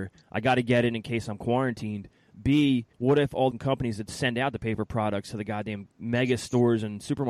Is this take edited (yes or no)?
yes